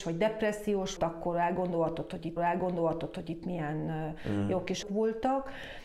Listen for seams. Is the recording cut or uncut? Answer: cut